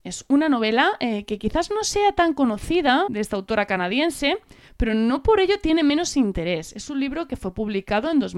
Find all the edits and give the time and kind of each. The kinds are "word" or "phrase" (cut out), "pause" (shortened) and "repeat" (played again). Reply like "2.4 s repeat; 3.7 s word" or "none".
3.1 s word